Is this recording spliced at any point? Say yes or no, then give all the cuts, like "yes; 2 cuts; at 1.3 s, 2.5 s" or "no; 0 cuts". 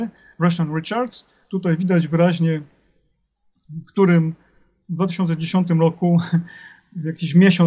no; 0 cuts